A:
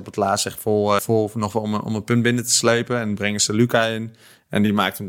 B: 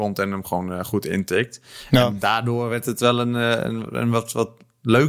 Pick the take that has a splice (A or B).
A